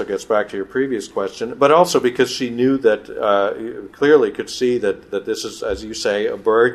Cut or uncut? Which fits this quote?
uncut